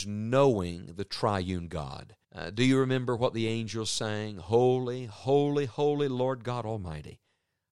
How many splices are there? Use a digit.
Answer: 1